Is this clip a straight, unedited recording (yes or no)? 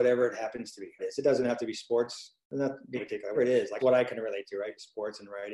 no